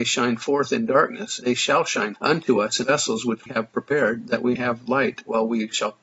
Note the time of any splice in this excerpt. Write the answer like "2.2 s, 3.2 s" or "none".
1.4 s, 2.2 s, 2.8 s, 3.5 s, 4.5 s